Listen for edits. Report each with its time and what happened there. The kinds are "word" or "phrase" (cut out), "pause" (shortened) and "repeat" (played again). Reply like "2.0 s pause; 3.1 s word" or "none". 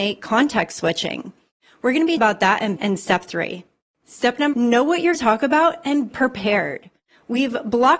2.2 s word; 2.8 s word; 4.5 s word; 5.1 s word; 6.1 s word